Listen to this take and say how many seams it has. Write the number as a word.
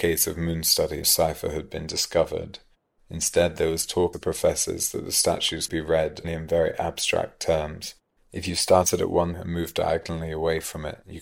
five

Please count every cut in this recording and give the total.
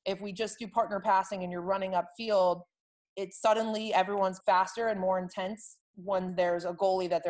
two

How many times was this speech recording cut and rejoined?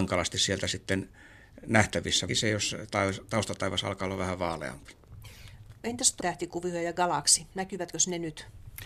two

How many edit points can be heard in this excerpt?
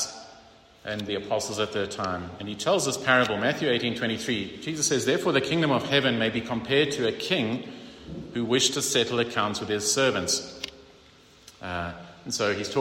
zero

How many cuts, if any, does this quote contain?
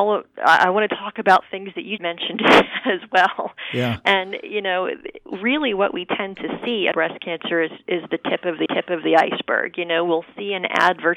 three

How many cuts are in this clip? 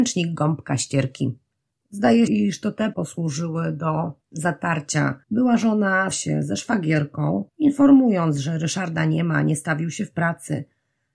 six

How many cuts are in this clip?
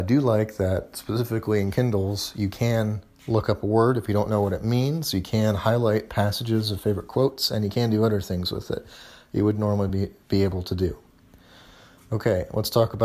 zero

